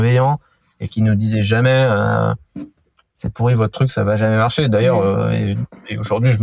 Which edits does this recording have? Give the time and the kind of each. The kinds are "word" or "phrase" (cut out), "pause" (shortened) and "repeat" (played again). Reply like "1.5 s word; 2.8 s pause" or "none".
none